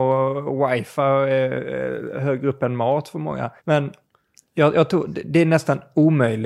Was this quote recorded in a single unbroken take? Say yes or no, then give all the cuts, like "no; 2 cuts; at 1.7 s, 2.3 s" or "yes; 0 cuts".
no; 1 cut; at 3.6 s